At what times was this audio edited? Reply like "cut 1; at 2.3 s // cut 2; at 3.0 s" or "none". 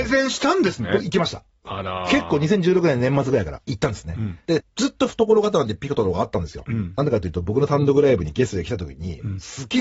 cut 1; at 4.4 s